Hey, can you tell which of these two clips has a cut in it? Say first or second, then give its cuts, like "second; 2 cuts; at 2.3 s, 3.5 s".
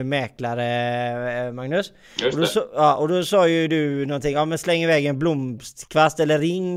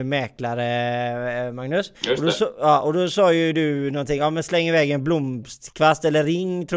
second; 1 cut; at 1.9 s